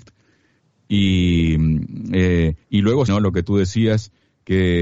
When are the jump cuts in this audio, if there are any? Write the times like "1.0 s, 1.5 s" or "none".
2.6 s, 3.1 s